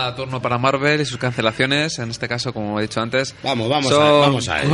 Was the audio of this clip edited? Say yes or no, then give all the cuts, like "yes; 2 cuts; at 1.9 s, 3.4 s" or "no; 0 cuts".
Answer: no; 0 cuts